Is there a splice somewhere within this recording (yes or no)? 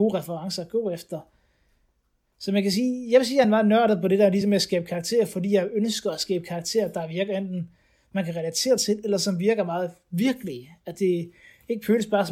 no